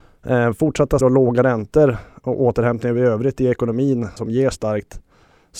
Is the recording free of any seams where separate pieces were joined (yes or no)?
no